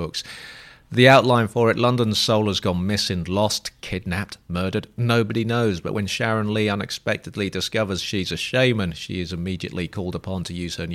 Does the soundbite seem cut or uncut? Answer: uncut